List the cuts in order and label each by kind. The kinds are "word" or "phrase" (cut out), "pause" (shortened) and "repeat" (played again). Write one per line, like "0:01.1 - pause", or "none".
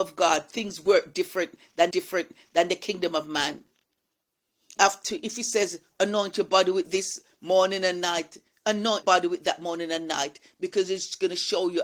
0:01.9 - repeat
0:04.8 - phrase
0:09.0 - word